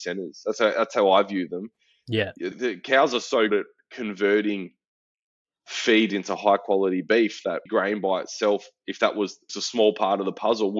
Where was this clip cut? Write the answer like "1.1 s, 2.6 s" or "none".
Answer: 2.5 s, 3.5 s, 7.7 s, 9.5 s